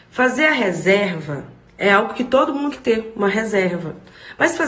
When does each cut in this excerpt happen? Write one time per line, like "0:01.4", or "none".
0:01.7
0:02.7